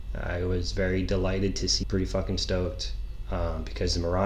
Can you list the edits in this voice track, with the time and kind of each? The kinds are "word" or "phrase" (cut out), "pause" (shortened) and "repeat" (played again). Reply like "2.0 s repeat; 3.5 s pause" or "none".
1.8 s word

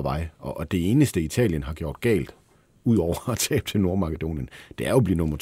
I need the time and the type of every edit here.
none

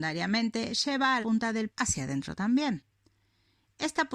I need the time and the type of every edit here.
1.2 s word; 1.7 s word

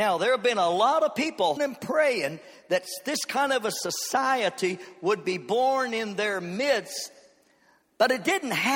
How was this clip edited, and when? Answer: 1.6 s word

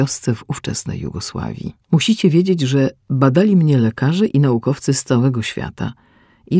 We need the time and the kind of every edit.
1.8 s pause

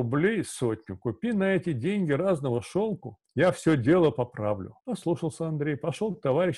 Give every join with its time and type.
3.2 s pause; 4.8 s pause

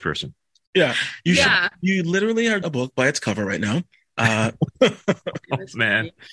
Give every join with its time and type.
2.6 s word

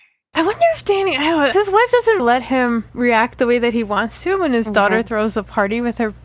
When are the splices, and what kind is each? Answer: 1.5 s word; 2.2 s word

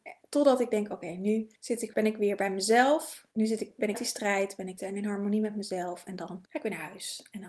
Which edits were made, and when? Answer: 1.6 s pause; 1.9 s word; 3.3 s pause; 3.9 s word; 4.8 s phrase; 6.4 s pause

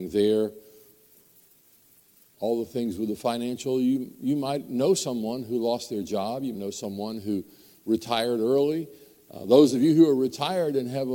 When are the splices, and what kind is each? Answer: 6.5 s word

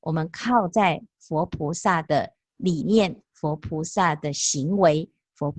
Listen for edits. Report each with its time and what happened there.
2.4 s pause

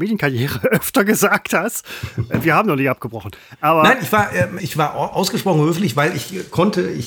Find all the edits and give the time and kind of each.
4.6 s word

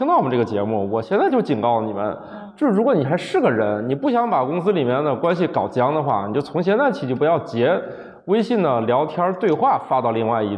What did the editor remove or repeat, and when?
none

